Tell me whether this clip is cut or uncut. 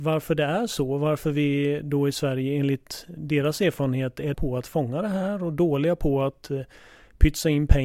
cut